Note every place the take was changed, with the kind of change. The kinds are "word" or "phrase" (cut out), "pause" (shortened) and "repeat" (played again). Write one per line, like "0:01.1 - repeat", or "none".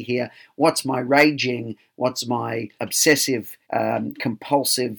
0:02.8 - word
0:03.6 - pause